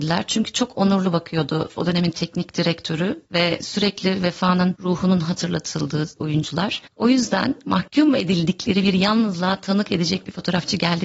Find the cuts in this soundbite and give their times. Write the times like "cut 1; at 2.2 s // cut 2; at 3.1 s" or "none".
cut 1; at 3.3 s

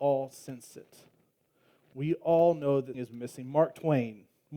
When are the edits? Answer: cut 1; at 2.9 s

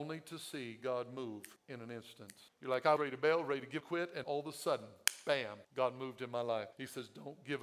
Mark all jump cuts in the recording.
cut 1; at 1.6 s // cut 2; at 2.5 s // cut 3; at 3.0 s // cut 4; at 3.8 s // cut 5; at 4.2 s // cut 6; at 5.6 s // cut 7; at 6.7 s

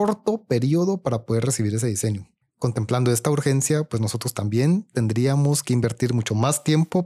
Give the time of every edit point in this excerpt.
cut 1; at 2.4 s

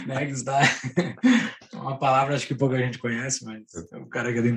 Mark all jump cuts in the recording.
none

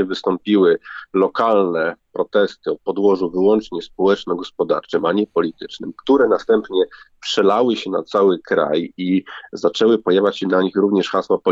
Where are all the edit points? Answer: none

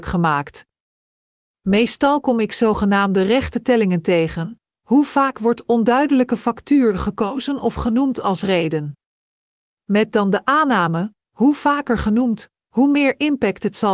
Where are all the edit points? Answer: none

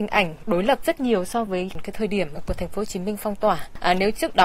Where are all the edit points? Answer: none

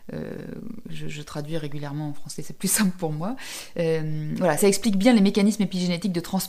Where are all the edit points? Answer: cut 1; at 4.6 s

